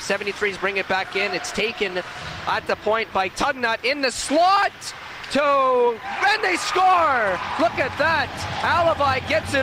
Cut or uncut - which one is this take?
uncut